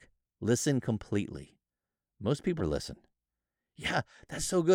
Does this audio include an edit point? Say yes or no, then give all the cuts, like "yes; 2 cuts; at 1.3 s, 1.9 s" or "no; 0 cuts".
yes; 1 cut; at 2.6 s